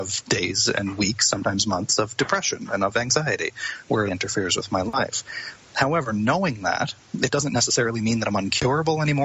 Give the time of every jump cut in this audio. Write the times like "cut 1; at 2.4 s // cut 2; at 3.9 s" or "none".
cut 1; at 4.1 s

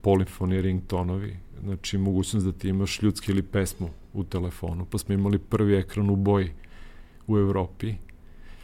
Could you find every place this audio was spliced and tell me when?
cut 1; at 3.3 s

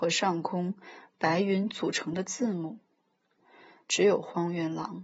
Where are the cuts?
none

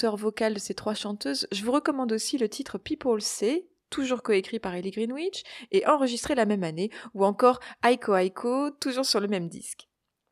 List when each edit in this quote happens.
none

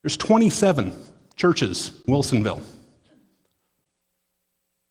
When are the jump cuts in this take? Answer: cut 1; at 2.1 s

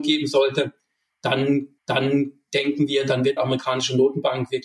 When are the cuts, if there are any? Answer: cut 1; at 1.8 s // cut 2; at 3.4 s

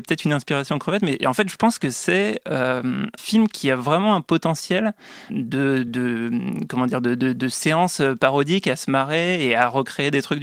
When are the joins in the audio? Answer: cut 1; at 3.2 s // cut 2; at 5.3 s // cut 3; at 5.9 s

